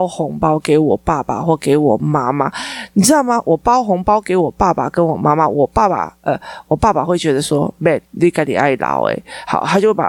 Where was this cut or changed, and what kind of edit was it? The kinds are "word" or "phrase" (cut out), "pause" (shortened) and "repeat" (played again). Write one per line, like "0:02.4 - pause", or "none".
0:08.1 - pause